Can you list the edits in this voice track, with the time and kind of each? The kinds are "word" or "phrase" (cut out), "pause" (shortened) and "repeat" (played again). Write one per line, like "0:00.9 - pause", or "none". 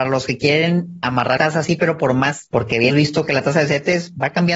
0:01.4 - word
0:02.5 - word
0:02.9 - word